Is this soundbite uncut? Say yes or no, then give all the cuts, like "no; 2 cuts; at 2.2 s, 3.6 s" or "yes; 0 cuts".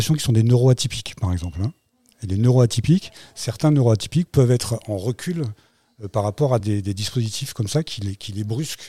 yes; 0 cuts